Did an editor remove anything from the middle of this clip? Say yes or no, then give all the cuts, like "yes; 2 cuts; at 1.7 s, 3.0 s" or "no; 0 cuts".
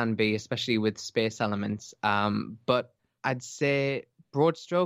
no; 0 cuts